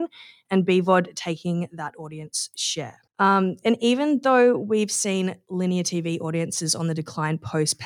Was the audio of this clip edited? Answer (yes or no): yes